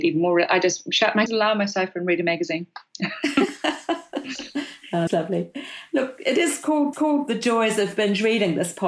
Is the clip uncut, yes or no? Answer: no